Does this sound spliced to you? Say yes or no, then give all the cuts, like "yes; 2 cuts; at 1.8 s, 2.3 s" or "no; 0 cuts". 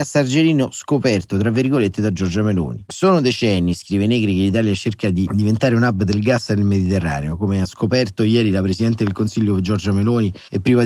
no; 0 cuts